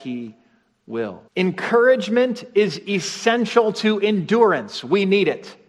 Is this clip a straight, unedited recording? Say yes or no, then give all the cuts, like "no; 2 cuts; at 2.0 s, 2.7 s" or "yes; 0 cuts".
no; 1 cut; at 1.3 s